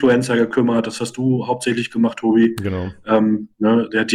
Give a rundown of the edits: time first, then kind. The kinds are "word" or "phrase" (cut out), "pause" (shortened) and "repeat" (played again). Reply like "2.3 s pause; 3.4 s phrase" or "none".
none